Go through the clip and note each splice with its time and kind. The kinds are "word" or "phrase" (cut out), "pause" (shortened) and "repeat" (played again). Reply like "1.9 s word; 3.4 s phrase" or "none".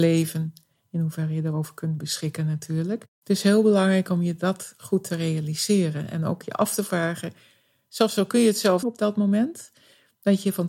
3.1 s pause; 8.8 s phrase